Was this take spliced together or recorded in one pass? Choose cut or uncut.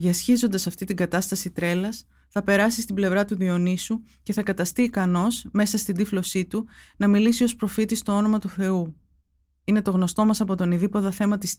uncut